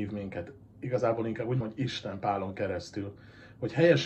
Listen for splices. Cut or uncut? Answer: cut